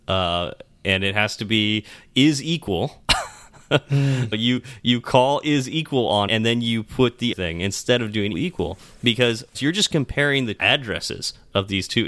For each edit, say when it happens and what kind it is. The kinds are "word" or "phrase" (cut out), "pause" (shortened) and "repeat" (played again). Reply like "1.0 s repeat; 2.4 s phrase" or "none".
4.3 s word; 6.3 s word; 7.3 s word; 8.3 s word; 9.5 s word; 10.6 s word